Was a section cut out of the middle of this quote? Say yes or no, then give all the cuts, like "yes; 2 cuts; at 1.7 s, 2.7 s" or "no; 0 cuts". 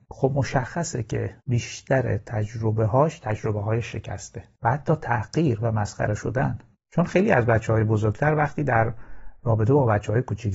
yes; 1 cut; at 1.4 s